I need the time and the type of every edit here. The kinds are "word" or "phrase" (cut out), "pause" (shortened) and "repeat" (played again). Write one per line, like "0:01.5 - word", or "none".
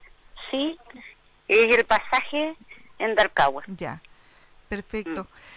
none

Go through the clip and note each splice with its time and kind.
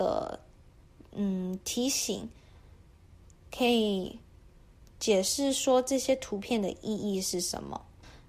none

